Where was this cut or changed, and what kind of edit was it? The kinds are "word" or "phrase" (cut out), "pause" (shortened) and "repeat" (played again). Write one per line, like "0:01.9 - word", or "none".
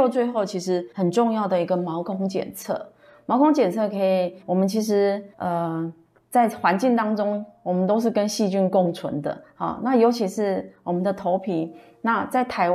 0:00.9 - pause
0:04.4 - pause
0:05.3 - pause